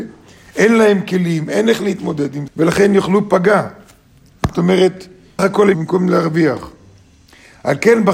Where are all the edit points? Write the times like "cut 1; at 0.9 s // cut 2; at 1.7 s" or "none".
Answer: cut 1; at 2.5 s // cut 2; at 5.4 s // cut 3; at 5.7 s